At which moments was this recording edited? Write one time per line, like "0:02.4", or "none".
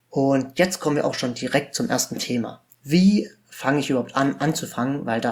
0:02.7

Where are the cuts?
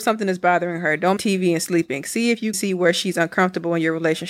0:01.2
0:02.5

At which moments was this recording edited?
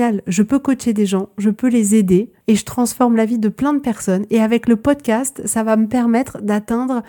0:02.4

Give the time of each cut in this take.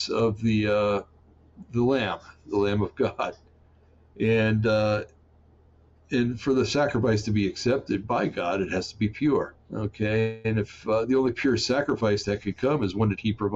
0:09.6

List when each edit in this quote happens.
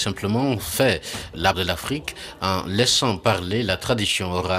0:01.5

